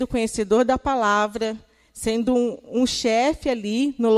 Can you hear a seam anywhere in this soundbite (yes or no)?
no